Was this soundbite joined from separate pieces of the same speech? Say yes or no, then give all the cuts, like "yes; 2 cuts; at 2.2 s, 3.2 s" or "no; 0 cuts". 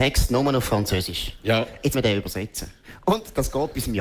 yes; 1 cut; at 1.9 s